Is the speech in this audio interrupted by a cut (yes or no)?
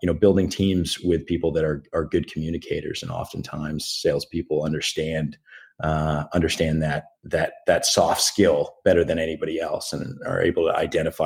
yes